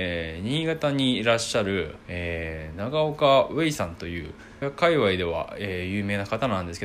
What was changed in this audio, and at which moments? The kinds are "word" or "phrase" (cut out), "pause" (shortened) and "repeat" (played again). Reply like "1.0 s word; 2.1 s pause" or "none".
2.0 s pause; 4.6 s phrase